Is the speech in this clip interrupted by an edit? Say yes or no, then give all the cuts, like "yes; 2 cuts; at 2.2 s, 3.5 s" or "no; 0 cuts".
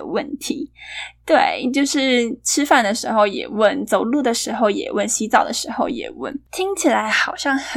yes; 1 cut; at 6.5 s